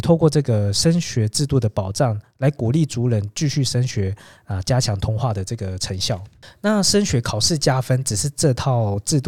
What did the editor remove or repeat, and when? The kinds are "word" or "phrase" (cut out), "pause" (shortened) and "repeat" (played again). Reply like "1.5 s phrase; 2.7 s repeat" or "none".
none